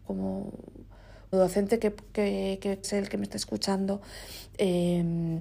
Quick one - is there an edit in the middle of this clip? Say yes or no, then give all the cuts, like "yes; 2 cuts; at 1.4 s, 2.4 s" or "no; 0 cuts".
yes; 3 cuts; at 1.3 s, 1.8 s, 2.8 s